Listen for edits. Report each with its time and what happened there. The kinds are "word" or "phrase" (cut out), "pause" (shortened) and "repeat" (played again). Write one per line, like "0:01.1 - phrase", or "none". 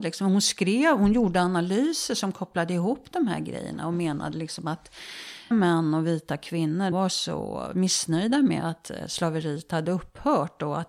0:05.5 - word
0:06.9 - phrase